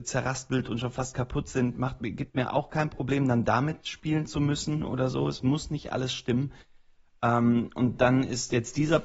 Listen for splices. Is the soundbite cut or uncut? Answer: uncut